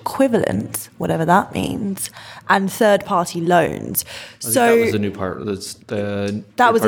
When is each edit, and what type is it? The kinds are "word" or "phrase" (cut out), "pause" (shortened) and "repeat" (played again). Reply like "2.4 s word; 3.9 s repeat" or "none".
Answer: 5.8 s pause